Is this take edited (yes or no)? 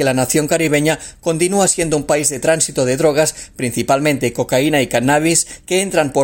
no